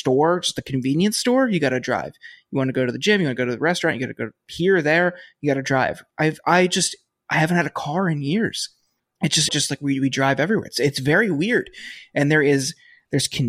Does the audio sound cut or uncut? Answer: cut